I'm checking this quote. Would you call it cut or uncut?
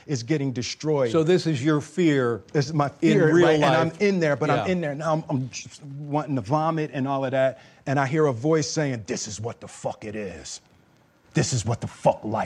uncut